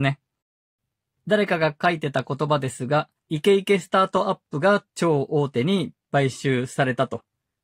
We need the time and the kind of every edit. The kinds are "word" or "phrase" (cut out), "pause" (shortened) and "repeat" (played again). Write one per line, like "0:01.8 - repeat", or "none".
0:03.2 - pause
0:04.9 - pause

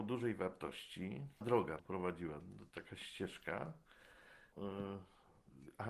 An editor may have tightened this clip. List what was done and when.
0:01.4 - word
0:01.8 - word
0:02.4 - word
0:04.5 - word

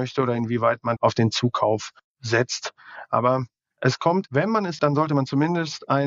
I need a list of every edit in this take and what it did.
0:01.0 - word
0:04.3 - word
0:04.8 - word

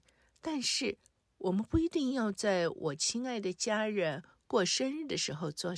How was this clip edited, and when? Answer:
none

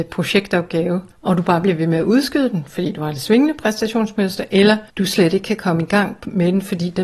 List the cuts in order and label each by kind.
0:01.1 - pause
0:04.9 - pause

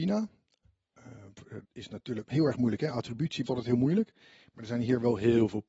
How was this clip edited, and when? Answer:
0:01.6 - word
0:02.2 - word
0:03.4 - word

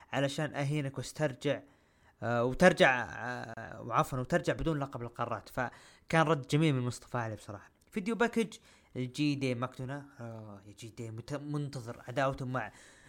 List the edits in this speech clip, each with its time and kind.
none

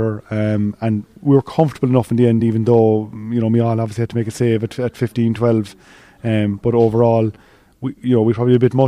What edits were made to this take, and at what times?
none

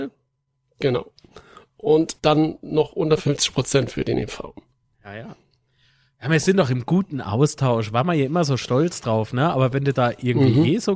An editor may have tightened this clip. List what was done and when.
0:02.2 - word

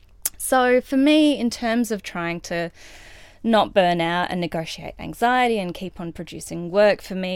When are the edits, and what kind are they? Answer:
none

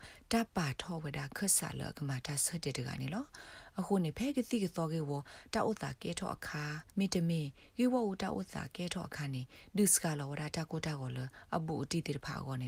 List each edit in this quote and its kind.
0:06.9 - pause

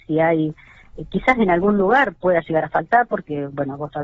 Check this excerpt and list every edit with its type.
none

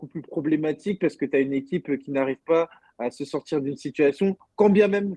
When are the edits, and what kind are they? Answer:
none

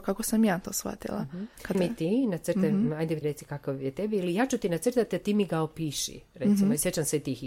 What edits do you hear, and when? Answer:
0:01.7 - phrase
0:03.2 - word

